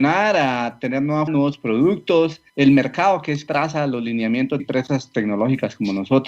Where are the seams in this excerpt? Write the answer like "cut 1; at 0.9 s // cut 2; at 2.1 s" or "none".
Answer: cut 1; at 1.3 s // cut 2; at 2.5 s // cut 3; at 3.5 s // cut 4; at 4.6 s

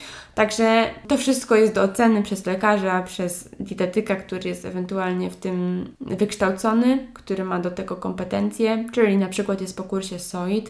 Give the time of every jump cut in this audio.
cut 1; at 5.9 s

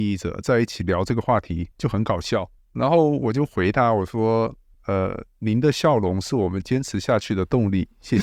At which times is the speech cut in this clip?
cut 1; at 1.7 s // cut 2; at 2.6 s // cut 3; at 4.7 s

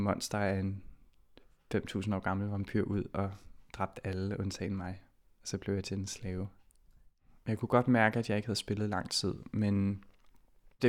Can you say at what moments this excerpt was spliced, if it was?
none

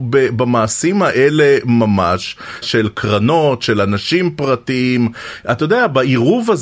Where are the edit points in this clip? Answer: cut 1; at 2.6 s

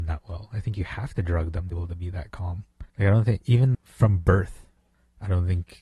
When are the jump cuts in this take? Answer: cut 1; at 1.7 s // cut 2; at 2.9 s // cut 3; at 3.7 s

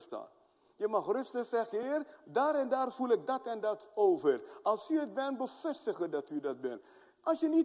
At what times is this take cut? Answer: none

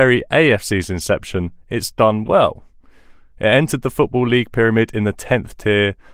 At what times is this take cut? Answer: none

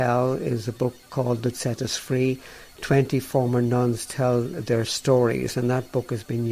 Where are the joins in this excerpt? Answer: cut 1; at 1.5 s

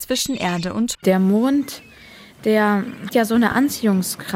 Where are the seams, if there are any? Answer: cut 1; at 0.9 s // cut 2; at 3.1 s

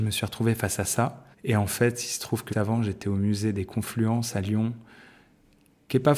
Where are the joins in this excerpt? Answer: cut 1; at 1.3 s // cut 2; at 2.5 s

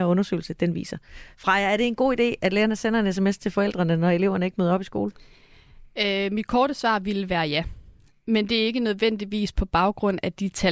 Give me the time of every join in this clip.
none

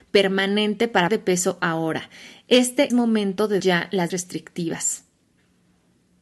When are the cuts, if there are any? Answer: cut 1; at 1.1 s // cut 2; at 2.9 s // cut 3; at 3.6 s // cut 4; at 4.1 s

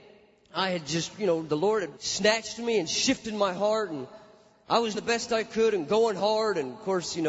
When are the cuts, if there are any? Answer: cut 1; at 2.0 s // cut 2; at 4.9 s

